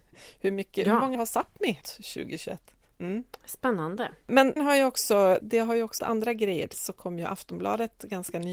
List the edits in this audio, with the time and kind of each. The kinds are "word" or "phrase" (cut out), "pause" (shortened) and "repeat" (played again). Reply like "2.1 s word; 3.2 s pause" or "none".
1.1 s word; 1.8 s word; 4.6 s word; 5.4 s word; 6.0 s word; 6.7 s word